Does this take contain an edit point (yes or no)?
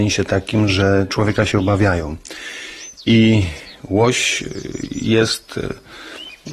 no